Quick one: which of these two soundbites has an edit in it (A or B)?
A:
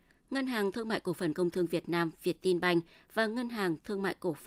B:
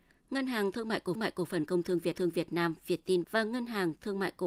B